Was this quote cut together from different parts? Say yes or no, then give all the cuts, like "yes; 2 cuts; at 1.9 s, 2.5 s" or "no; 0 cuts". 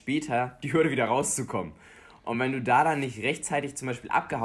no; 0 cuts